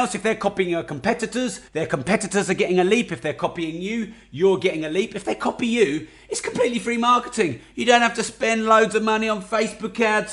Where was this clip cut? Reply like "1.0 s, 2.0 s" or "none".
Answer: 1.7 s

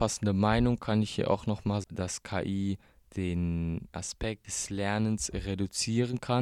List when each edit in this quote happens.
1.8 s, 3.9 s

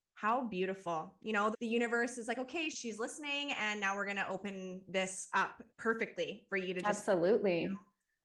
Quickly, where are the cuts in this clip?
1.5 s, 2.7 s, 5.7 s

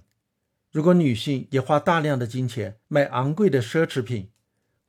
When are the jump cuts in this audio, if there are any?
2.8 s

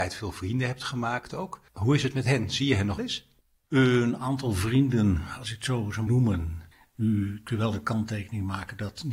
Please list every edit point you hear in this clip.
1.7 s, 3.0 s, 6.1 s, 6.7 s

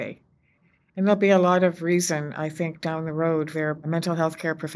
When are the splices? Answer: 3.5 s

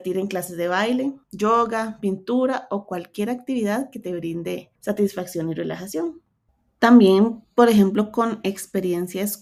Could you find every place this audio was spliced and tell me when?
1.2 s, 4.8 s, 6.5 s

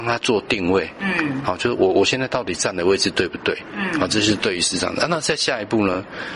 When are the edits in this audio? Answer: none

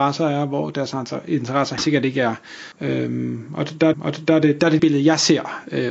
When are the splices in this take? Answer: 1.8 s, 2.7 s, 3.9 s, 4.8 s

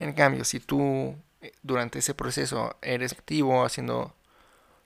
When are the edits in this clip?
3.1 s

